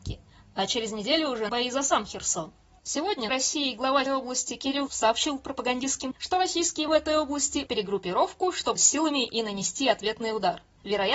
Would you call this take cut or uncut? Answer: cut